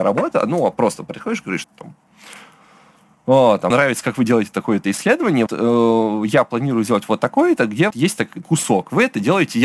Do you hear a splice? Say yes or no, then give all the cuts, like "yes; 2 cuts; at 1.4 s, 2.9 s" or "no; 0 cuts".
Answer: yes; 5 cuts; at 1.6 s, 3.7 s, 5.5 s, 7.9 s, 8.4 s